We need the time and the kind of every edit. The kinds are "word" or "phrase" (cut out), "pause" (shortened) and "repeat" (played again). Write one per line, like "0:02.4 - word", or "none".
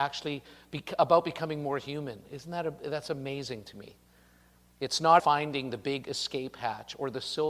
0:05.2 - word